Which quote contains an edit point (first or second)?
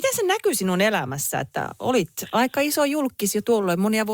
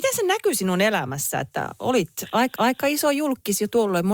second